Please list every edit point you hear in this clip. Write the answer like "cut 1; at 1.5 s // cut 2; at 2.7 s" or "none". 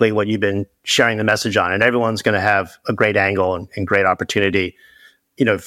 none